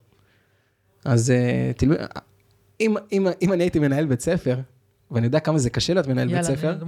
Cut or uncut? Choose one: uncut